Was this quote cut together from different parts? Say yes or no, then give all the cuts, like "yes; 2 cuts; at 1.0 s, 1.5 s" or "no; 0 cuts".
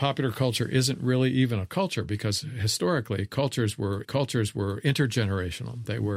yes; 1 cut; at 4.0 s